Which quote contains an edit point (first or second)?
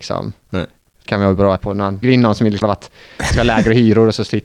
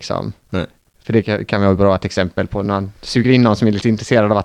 first